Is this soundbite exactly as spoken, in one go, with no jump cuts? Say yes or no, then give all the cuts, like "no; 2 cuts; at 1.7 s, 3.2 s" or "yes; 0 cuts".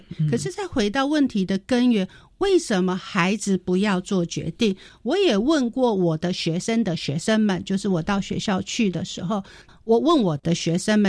yes; 0 cuts